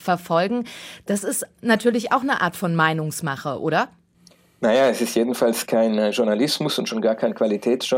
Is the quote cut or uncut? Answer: uncut